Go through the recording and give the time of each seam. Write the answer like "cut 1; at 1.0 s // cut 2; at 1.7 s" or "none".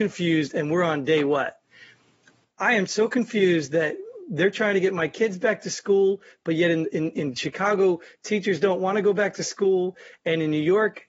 none